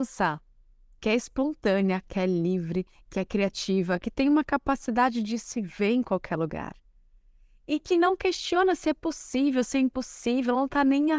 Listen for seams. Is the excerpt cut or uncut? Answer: uncut